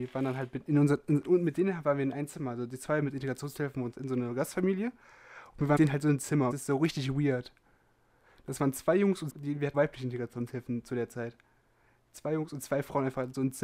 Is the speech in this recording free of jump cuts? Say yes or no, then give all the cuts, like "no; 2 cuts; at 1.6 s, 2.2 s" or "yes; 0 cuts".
no; 6 cuts; at 1.2 s, 3.9 s, 5.8 s, 6.5 s, 9.3 s, 9.7 s